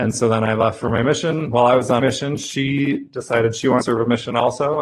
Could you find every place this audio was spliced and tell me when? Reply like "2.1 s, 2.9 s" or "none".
2.0 s, 3.8 s